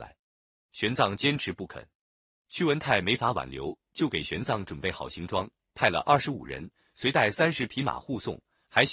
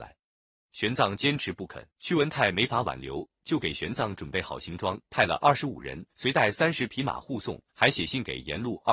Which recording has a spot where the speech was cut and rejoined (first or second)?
second